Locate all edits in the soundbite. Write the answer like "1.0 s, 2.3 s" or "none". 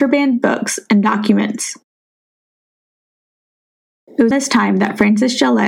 4.3 s